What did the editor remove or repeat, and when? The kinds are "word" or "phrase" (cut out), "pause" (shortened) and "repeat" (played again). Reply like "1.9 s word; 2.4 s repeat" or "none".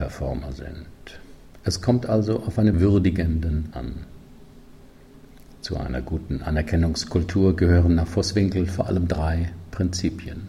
2.7 s phrase; 3.7 s word